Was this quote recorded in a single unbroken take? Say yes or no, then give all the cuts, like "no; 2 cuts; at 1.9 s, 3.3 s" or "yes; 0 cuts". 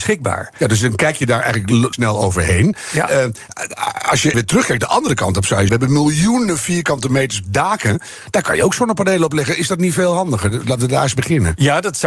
no; 3 cuts; at 1.9 s, 4.3 s, 5.7 s